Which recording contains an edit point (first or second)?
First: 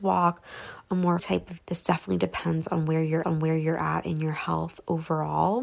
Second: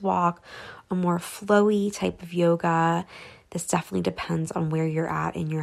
first